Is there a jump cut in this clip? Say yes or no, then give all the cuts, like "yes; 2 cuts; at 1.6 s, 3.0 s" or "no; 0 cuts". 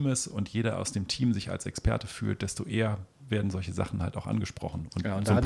no; 0 cuts